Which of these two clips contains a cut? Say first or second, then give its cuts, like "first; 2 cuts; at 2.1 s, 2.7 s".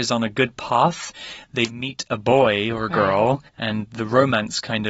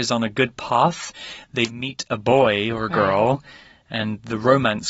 first; 1 cut; at 3.5 s